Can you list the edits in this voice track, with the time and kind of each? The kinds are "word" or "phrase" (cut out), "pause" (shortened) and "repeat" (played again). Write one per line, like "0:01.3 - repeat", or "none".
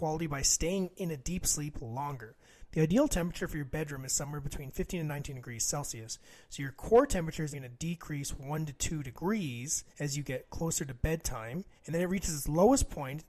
0:07.5 - word
0:09.9 - pause
0:11.8 - pause